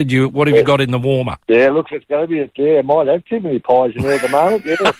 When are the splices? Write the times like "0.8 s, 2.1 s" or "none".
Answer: 1.4 s, 1.9 s